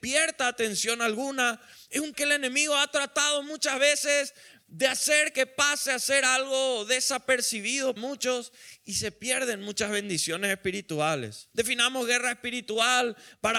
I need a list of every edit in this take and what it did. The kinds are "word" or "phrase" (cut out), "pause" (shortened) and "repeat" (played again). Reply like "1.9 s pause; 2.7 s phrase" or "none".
2.1 s word; 8.0 s word; 11.5 s pause